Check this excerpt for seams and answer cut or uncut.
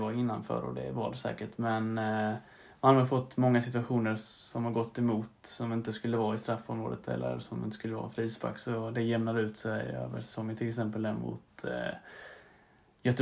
uncut